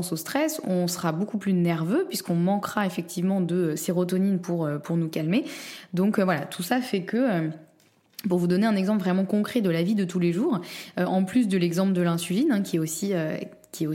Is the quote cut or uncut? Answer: uncut